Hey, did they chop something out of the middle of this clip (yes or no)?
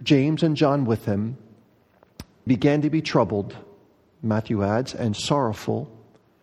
yes